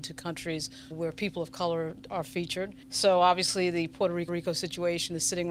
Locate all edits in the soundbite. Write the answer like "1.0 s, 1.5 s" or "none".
0.9 s, 2.1 s, 2.8 s, 4.3 s